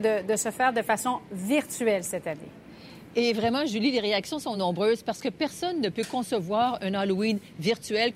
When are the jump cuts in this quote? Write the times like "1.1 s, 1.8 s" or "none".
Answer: none